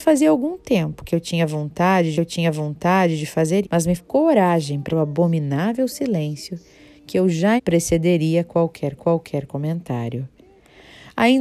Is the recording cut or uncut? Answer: cut